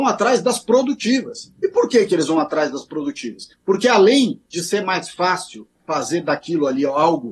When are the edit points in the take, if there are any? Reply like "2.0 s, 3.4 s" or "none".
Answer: 3.5 s, 4.5 s, 5.8 s